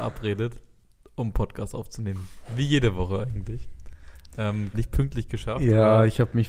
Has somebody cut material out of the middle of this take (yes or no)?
yes